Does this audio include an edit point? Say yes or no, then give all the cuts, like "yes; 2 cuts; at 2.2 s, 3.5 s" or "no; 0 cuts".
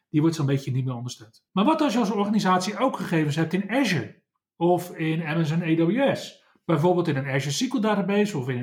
no; 0 cuts